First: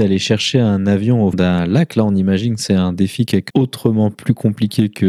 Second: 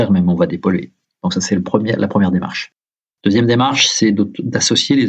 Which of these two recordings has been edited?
first; 2 cuts; at 1.3 s, 3.5 s

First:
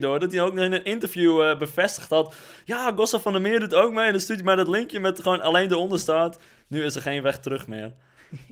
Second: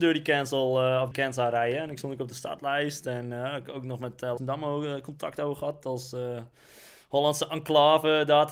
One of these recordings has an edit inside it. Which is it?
second; 2 cuts; at 1.1 s, 4.4 s

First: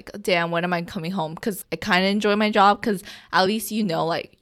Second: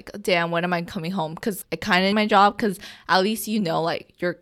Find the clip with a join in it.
second; 1 cut; at 2.1 s

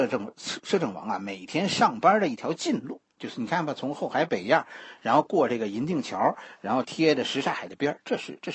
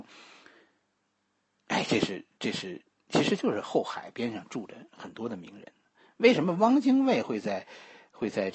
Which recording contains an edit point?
first; 1 cut; at 3.1 s

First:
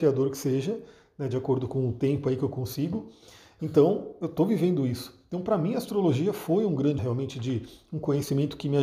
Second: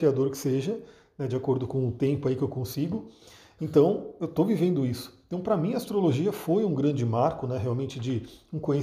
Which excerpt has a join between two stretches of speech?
first; 1 cut; at 7.0 s

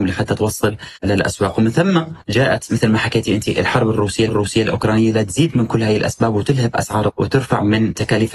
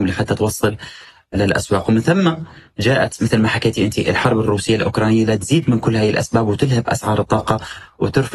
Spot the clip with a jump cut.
first; 4 cuts; at 1.0 s, 2.2 s, 4.3 s, 7.1 s

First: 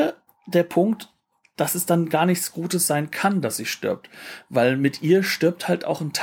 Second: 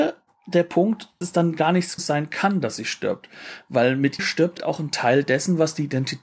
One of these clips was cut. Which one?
second; 4 cuts; at 1.2 s, 2.0 s, 4.2 s, 4.6 s

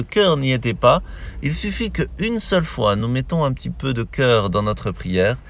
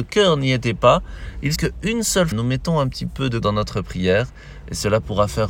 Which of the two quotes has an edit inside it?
second; 3 cuts; at 1.6 s, 2.3 s, 3.4 s

